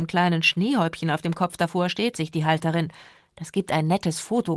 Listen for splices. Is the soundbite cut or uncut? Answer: cut